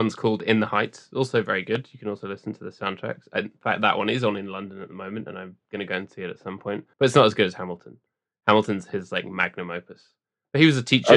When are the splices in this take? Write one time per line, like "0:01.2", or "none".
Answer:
0:06.9